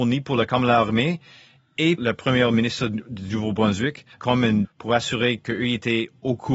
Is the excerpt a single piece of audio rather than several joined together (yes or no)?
no